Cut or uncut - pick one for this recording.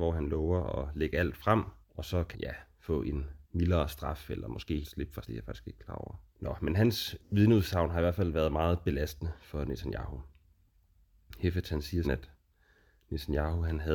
cut